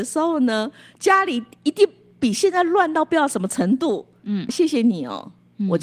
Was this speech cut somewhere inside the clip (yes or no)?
yes